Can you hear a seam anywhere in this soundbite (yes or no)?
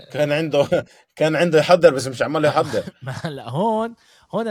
no